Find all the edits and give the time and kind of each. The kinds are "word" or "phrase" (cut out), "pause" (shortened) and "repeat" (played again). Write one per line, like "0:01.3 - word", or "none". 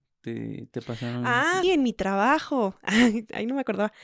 0:01.6 - word